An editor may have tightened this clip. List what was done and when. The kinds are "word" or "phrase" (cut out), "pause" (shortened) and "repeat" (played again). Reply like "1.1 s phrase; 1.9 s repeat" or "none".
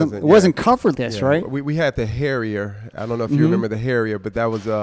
0.9 s word